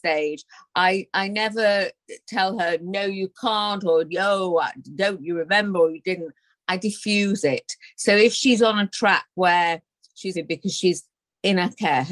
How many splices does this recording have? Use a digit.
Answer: 1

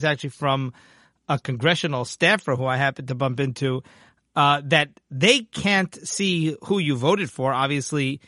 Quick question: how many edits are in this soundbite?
0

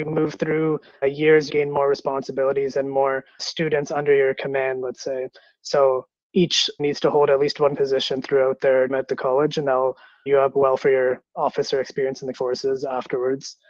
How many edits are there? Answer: 8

